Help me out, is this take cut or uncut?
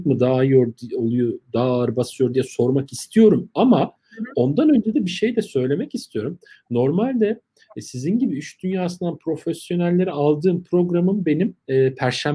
uncut